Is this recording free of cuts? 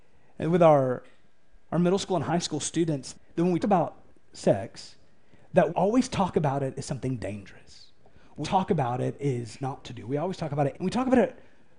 no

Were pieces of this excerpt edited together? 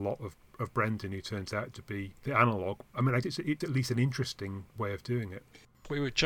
yes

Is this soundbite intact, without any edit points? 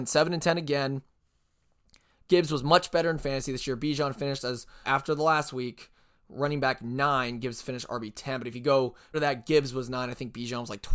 no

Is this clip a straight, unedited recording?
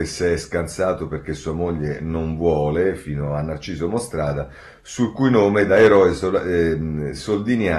yes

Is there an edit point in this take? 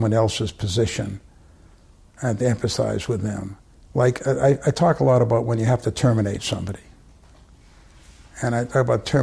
no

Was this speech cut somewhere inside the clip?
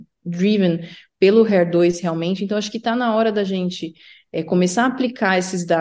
no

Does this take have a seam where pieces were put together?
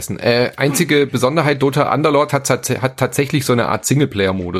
no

